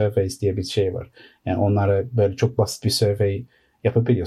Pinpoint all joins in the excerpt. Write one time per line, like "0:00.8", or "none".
none

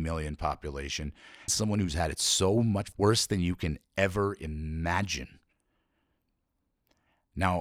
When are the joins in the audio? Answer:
0:01.5
0:02.9

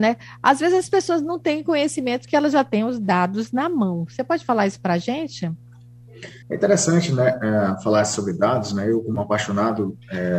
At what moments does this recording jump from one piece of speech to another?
0:06.4

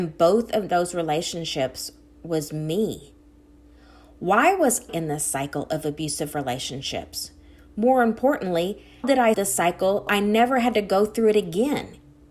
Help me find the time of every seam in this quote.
0:04.9
0:09.0
0:09.3
0:10.1

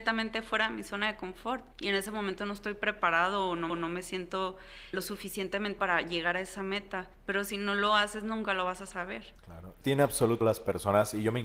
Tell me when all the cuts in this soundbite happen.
0:01.7
0:03.7
0:04.9
0:05.8
0:07.1
0:09.4
0:09.8
0:10.4

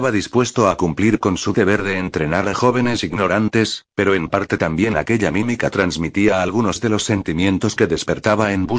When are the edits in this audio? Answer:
none

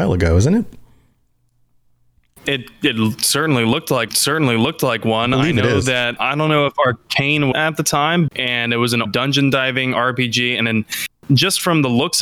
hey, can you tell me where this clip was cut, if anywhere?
0:04.1
0:06.2
0:07.5
0:08.3
0:09.1

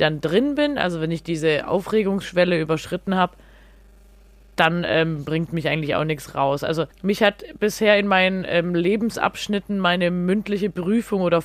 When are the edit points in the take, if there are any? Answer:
0:06.9

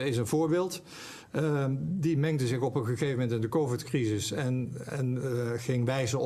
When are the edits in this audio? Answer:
none

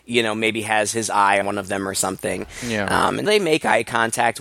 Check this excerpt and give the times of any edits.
0:01.4
0:03.3

